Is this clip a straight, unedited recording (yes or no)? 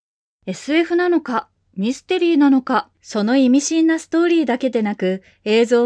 no